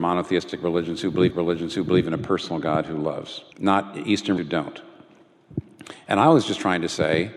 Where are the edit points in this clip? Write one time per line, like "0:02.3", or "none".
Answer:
0:01.3
0:03.5
0:04.4